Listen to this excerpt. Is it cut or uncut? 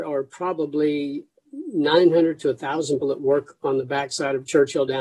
cut